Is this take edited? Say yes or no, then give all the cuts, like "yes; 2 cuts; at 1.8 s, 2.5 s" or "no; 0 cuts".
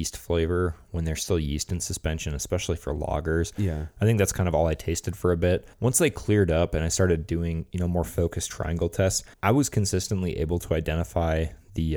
yes; 2 cuts; at 5.7 s, 9.3 s